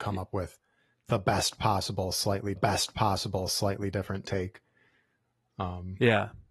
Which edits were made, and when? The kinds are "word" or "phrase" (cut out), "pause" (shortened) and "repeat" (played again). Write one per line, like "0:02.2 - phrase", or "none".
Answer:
0:02.6 - repeat